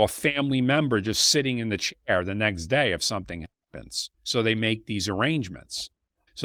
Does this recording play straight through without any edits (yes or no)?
no